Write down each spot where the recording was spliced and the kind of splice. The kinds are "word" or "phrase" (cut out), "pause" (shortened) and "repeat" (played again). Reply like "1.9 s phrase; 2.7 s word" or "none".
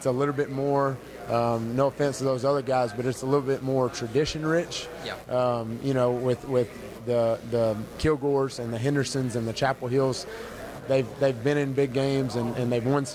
none